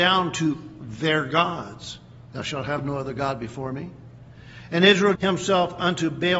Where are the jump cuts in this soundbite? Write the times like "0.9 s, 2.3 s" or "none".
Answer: 5.1 s